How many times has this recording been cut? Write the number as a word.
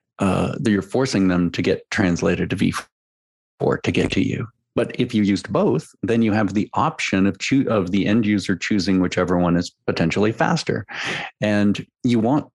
zero